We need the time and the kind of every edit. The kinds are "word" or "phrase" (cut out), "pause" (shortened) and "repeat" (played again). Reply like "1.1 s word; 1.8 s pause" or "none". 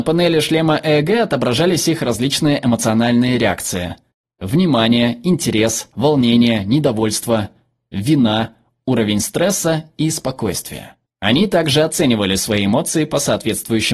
none